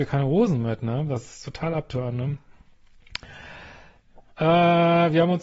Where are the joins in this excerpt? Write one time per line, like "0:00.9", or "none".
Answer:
none

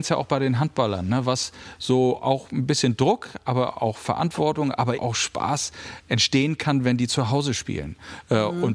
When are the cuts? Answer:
0:05.0

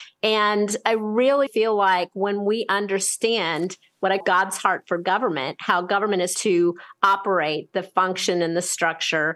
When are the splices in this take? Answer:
0:01.5
0:04.2
0:06.4

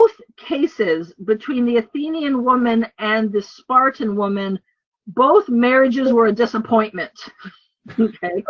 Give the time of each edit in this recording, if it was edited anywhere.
none

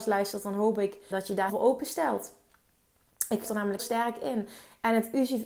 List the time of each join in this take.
0:01.1
0:01.5
0:03.4
0:03.8

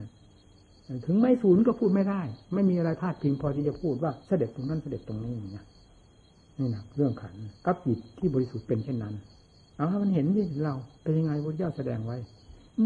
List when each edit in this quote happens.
0:04.2
0:07.6
0:09.3
0:10.9

